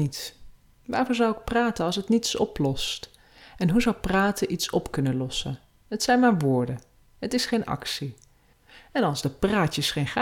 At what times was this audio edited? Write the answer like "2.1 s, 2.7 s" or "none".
none